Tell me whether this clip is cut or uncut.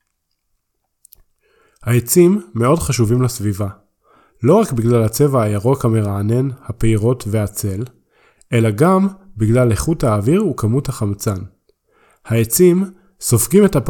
uncut